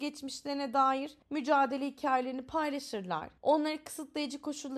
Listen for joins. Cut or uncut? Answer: cut